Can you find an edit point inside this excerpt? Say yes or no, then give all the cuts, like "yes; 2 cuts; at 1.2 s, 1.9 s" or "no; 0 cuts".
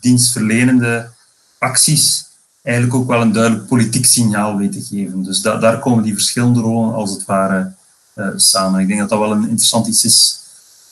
no; 0 cuts